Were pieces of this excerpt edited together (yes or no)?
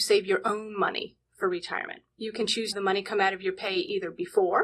yes